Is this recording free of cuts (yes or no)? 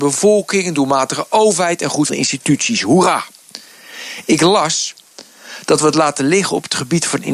no